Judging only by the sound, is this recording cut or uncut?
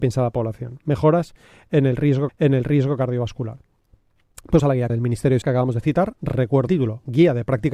cut